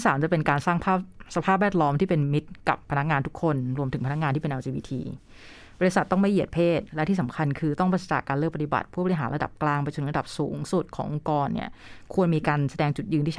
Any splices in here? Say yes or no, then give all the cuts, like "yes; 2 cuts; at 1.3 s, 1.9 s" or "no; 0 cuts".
no; 0 cuts